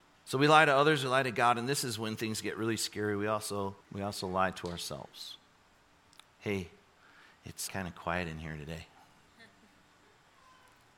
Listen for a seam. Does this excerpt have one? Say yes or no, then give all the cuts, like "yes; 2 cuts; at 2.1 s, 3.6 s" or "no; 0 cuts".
yes; 3 cuts; at 3.8 s, 5.8 s, 7.7 s